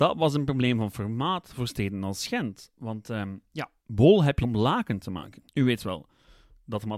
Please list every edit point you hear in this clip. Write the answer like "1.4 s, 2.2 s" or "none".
3.8 s, 4.4 s, 5.5 s